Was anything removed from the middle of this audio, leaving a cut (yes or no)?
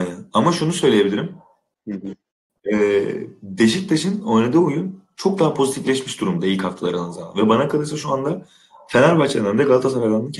no